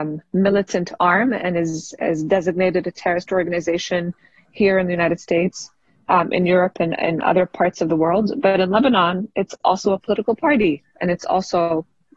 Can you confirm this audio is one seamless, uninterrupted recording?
yes; 0 cuts

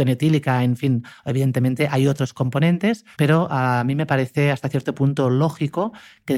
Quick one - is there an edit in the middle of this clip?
yes; 1 cut; at 3.1 s

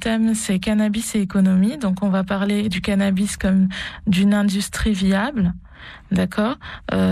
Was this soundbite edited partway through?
no; 0 cuts

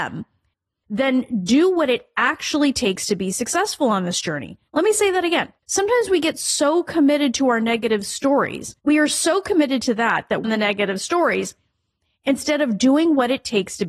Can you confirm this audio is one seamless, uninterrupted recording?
no; 4 cuts; at 4.7 s, 5.6 s, 8.8 s, 10.4 s

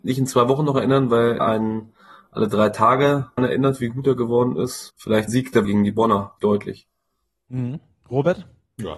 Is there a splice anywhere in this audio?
yes; 6 cuts; at 1.4 s, 3.4 s, 4.9 s, 5.3 s, 5.6 s, 6.4 s

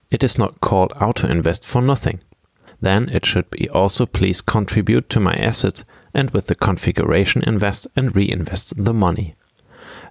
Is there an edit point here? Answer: no; 0 cuts

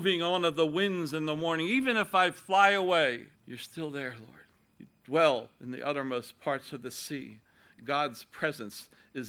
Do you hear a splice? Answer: yes; 2 cuts; at 3.3 s, 4.6 s

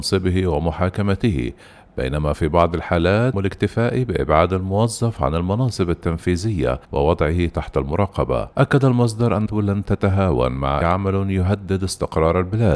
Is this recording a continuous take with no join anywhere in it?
no; 5 cuts; at 3.3 s, 6.8 s, 8.5 s, 9.5 s, 10.8 s

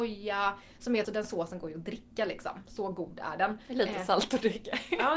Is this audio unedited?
no; 1 cut; at 1.0 s

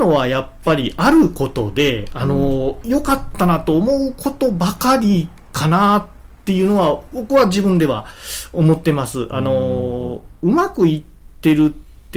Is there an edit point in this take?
no; 0 cuts

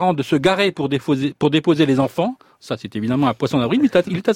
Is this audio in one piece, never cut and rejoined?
yes; 0 cuts

